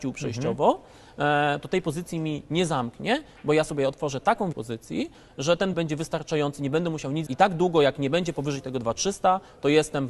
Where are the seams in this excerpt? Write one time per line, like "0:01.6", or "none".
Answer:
0:04.5
0:05.7
0:07.3